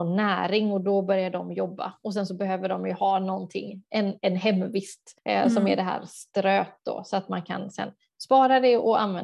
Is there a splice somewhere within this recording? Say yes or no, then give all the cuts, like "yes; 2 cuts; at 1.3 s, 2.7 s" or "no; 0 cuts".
no; 0 cuts